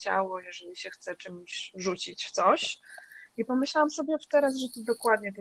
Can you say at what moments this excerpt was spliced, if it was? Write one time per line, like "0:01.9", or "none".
none

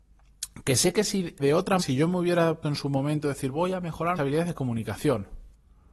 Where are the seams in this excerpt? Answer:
0:01.4
0:01.8
0:02.6
0:03.5
0:04.2

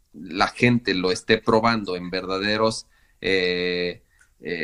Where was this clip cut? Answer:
none

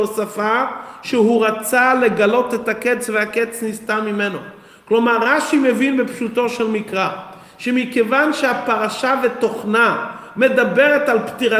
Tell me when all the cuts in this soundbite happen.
none

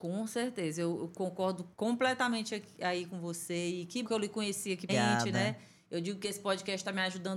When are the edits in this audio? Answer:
0:01.7
0:04.0
0:04.9

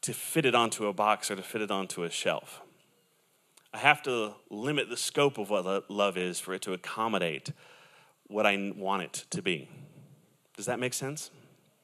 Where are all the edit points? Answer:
none

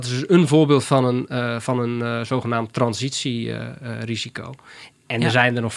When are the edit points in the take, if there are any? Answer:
none

